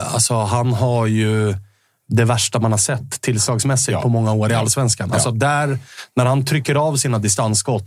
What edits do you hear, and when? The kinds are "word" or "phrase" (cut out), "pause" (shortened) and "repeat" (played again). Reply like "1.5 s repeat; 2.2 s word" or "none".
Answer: none